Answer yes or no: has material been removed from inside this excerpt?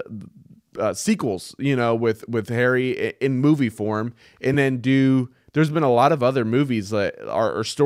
no